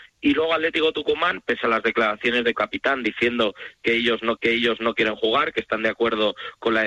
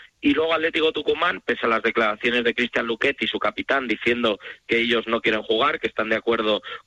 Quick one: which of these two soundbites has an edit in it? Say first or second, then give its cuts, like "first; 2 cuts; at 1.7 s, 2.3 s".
first; 2 cuts; at 2.5 s, 4.4 s